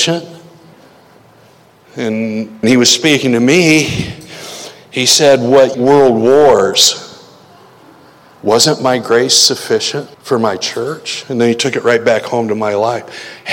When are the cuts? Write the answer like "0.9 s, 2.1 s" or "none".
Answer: 2.6 s, 5.7 s, 10.1 s

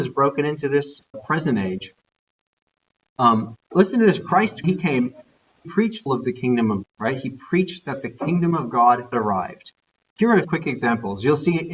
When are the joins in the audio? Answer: 1.1 s, 3.6 s, 4.6 s, 5.6 s, 6.1 s, 6.8 s, 9.1 s, 10.4 s

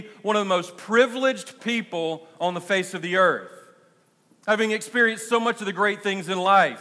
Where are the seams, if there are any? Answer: none

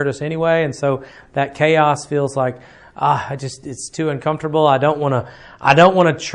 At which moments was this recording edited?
none

